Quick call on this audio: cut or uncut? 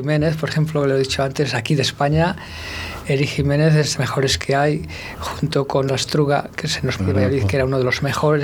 cut